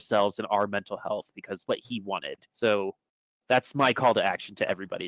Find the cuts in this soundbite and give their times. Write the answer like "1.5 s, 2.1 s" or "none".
1.6 s, 2.5 s